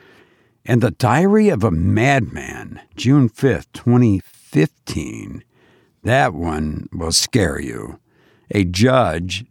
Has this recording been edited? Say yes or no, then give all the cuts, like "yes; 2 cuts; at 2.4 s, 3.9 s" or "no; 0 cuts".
yes; 1 cut; at 2.9 s